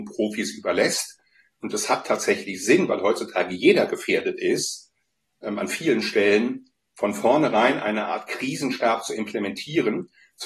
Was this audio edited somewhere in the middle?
no; 0 cuts

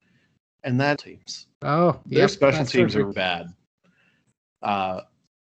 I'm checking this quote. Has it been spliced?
yes; 3 cuts; at 1.0 s, 1.5 s, 3.1 s

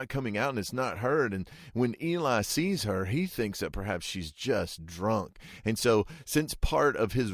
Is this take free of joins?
yes; 0 cuts

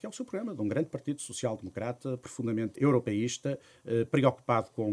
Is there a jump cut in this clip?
yes; 1 cut; at 2.8 s

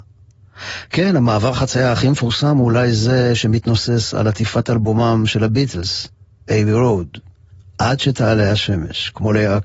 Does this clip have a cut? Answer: no; 0 cuts

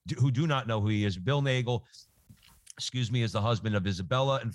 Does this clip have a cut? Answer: no; 0 cuts

